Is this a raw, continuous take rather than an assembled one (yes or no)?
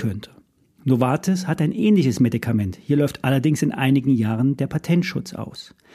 yes